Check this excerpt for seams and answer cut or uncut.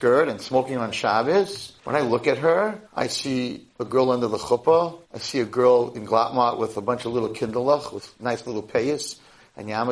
cut